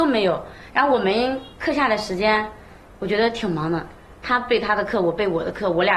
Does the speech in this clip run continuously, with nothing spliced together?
yes; 0 cuts

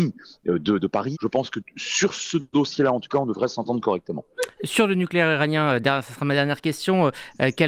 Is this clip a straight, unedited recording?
no; 1 cut; at 1.1 s

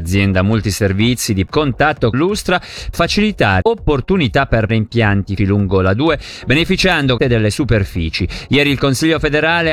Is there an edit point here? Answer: yes; 7 cuts; at 1.5 s, 2.1 s, 2.9 s, 3.6 s, 4.7 s, 5.4 s, 7.2 s

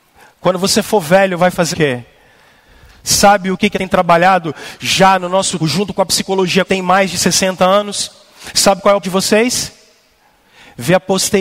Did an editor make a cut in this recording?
yes; 6 cuts; at 1.4 s, 1.7 s, 3.7 s, 5.6 s, 6.6 s, 9.0 s

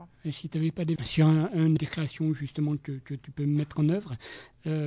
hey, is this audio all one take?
no; 3 cuts; at 1.0 s, 1.8 s, 2.8 s

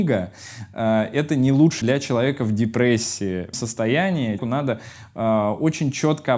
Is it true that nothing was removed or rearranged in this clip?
no; 3 cuts; at 1.8 s, 3.5 s, 4.4 s

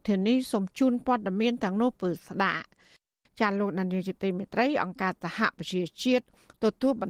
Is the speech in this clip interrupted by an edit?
no; 0 cuts

